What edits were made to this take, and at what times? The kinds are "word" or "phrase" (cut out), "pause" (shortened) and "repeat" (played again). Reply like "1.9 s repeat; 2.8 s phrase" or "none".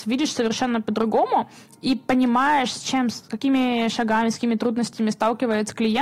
none